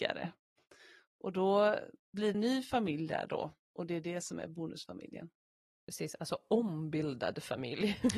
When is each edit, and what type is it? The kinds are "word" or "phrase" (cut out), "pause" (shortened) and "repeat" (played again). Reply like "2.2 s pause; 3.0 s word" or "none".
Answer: 2.3 s phrase